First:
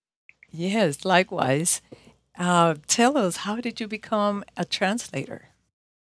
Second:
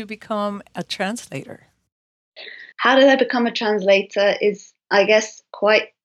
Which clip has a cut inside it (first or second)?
second